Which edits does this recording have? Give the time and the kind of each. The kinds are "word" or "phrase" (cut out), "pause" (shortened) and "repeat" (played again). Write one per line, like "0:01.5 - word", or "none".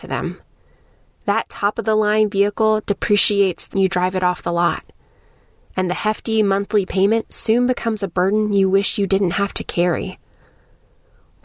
0:03.7 - word